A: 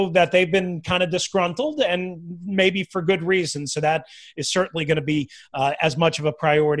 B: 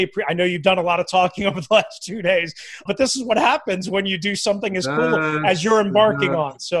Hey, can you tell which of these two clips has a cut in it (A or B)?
B